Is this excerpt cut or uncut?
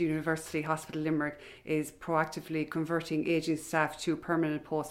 uncut